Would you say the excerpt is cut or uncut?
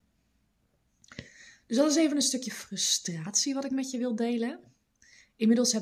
uncut